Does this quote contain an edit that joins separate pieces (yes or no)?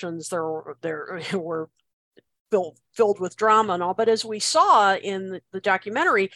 no